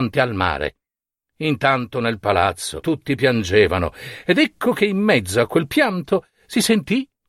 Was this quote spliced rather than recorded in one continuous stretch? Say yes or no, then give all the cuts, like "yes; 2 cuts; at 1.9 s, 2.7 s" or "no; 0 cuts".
no; 0 cuts